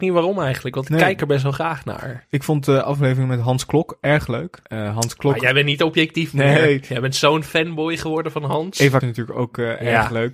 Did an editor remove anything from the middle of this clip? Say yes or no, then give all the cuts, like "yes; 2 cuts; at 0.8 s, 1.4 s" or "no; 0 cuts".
yes; 2 cuts; at 4.6 s, 9.0 s